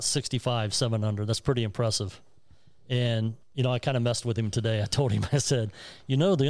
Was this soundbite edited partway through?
yes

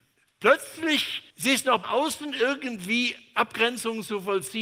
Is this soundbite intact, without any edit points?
no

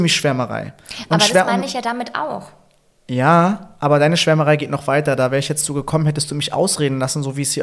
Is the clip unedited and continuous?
yes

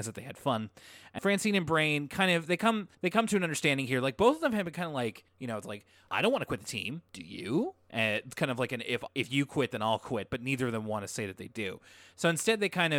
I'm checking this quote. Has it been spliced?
yes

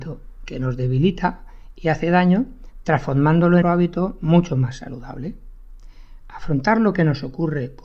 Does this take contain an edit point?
yes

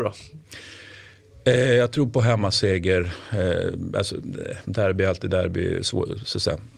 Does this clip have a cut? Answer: no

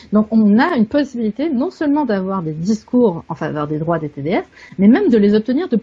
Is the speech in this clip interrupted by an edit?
no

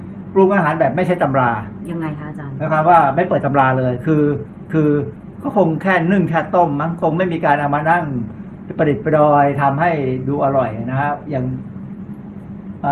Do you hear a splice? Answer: yes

